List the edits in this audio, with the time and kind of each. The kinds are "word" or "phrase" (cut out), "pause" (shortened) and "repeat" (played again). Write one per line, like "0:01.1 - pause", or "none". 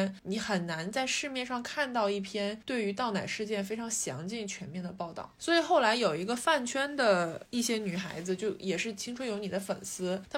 none